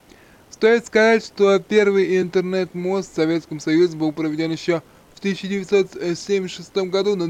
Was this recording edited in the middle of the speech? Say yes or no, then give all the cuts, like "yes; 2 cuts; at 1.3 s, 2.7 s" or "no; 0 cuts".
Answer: no; 0 cuts